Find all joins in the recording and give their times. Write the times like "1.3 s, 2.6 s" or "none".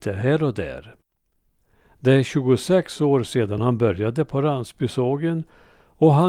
none